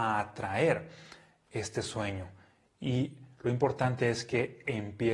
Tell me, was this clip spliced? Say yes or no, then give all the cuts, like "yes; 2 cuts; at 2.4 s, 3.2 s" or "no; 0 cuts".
no; 0 cuts